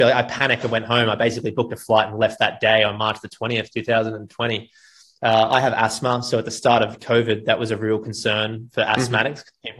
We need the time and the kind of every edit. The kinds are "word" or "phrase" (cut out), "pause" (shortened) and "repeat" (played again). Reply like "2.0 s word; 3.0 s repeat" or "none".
none